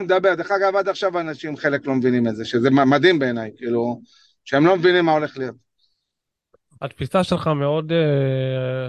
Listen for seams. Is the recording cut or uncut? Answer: uncut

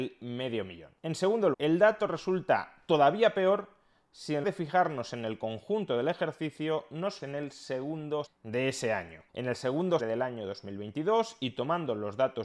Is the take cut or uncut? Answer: cut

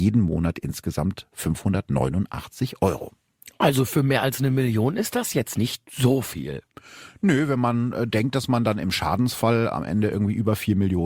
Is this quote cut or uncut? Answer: uncut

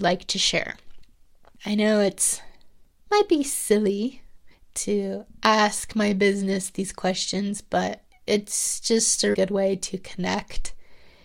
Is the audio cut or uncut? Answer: cut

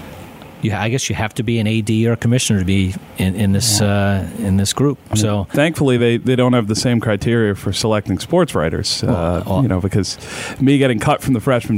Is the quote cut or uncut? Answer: uncut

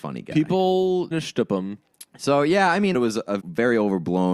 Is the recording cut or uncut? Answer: cut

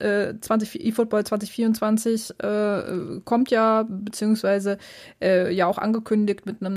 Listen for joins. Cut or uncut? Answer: uncut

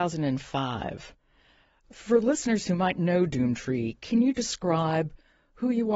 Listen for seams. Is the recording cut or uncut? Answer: cut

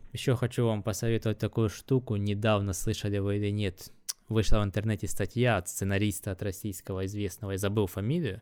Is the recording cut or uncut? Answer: uncut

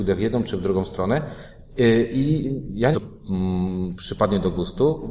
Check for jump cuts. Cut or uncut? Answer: cut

